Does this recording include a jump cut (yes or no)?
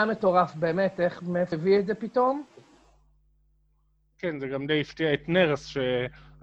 yes